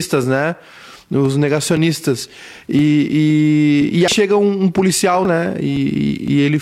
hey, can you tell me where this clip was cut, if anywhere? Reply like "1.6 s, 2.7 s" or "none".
4.1 s, 5.2 s